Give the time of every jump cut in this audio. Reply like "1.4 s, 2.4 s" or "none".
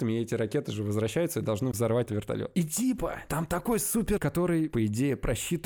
2.1 s, 4.2 s